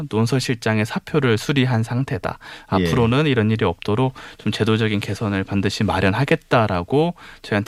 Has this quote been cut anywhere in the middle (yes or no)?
no